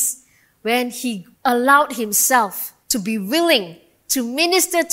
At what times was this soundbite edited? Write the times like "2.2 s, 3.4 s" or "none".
1.3 s, 2.8 s

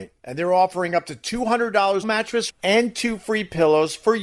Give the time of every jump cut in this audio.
2.0 s, 2.5 s

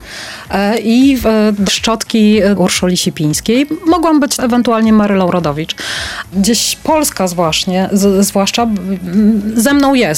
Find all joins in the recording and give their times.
1.7 s, 2.6 s, 4.4 s, 6.3 s

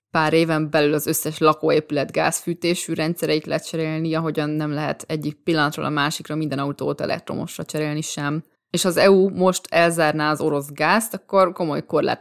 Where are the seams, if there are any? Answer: 8.5 s

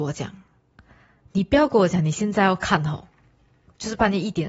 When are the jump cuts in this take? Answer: none

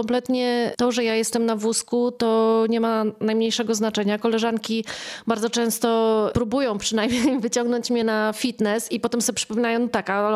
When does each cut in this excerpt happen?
none

